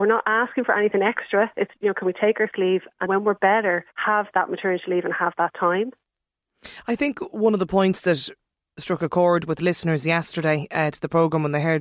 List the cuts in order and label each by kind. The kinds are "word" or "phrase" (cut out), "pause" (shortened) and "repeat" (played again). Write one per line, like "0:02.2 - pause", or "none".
0:01.7 - word
0:02.5 - word
0:03.1 - word
0:03.9 - pause